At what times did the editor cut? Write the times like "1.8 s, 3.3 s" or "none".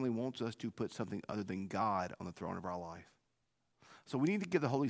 none